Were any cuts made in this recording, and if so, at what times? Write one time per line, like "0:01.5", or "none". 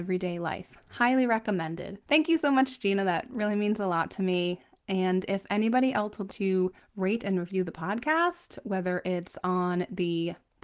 0:02.0
0:06.3